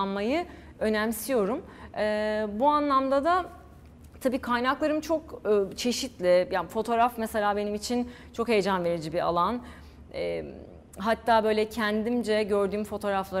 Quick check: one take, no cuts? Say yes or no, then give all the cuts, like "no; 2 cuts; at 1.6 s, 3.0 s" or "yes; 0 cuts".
yes; 0 cuts